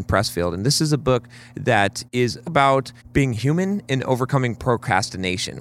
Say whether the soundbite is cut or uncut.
cut